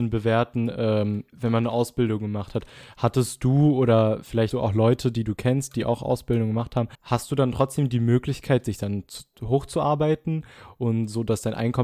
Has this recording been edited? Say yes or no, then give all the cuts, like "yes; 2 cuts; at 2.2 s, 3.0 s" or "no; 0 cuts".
yes; 3 cuts; at 1.3 s, 4.5 s, 6.9 s